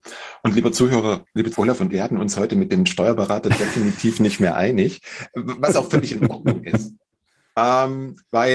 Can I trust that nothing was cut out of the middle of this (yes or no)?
no